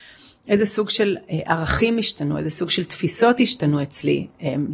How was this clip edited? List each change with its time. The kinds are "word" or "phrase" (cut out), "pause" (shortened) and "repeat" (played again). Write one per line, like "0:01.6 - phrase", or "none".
none